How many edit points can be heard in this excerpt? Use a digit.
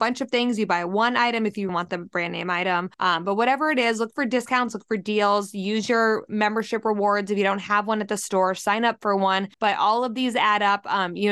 3